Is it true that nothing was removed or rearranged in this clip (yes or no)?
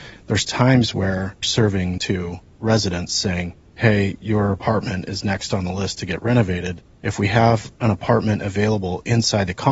no